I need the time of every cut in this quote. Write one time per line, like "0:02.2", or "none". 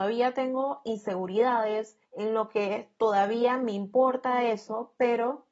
0:02.0